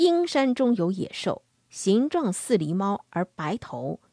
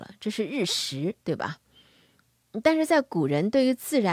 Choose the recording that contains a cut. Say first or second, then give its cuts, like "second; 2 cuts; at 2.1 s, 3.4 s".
second; 1 cut; at 1.2 s